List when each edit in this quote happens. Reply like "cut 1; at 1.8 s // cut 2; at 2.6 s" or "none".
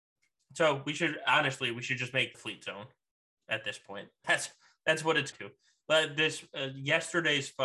cut 1; at 2.3 s // cut 2; at 4.2 s // cut 3; at 5.3 s